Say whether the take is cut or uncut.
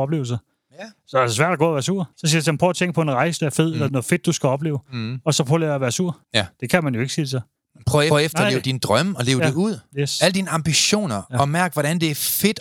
cut